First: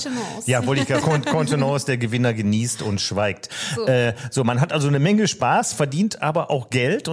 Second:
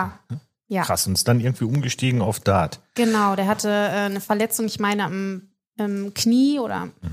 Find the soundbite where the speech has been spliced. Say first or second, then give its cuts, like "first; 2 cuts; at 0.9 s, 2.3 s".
first; 1 cut; at 1.0 s